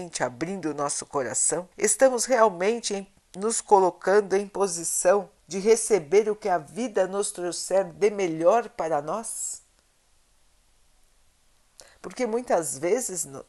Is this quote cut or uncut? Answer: cut